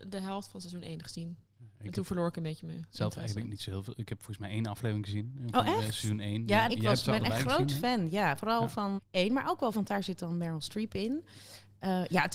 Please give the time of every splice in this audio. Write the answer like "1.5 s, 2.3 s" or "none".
6.7 s, 9.0 s, 9.7 s